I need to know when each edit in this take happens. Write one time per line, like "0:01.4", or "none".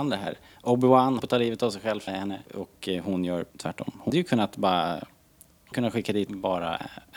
0:01.2
0:02.1
0:02.5
0:03.5
0:04.1
0:05.7
0:06.3